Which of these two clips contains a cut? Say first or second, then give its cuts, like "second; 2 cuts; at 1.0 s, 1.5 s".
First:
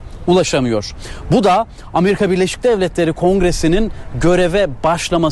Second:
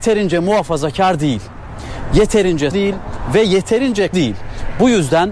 second; 2 cuts; at 2.7 s, 4.1 s